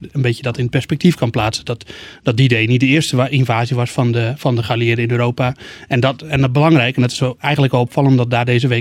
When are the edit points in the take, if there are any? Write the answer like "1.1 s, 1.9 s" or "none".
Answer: none